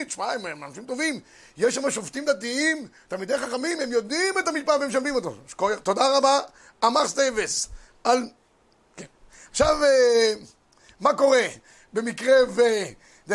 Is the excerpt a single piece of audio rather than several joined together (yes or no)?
yes